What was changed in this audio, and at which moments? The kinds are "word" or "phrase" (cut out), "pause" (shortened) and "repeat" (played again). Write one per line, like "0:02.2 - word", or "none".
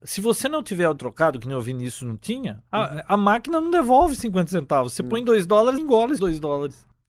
0:01.0 - word
0:02.7 - pause
0:05.8 - word
0:06.2 - word